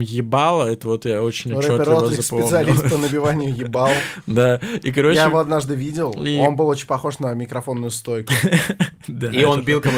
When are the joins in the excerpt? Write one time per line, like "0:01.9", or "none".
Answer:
none